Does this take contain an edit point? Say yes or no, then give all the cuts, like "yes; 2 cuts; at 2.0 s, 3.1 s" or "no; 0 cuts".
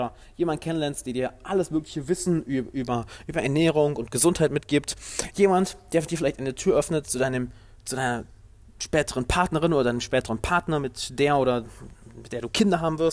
no; 0 cuts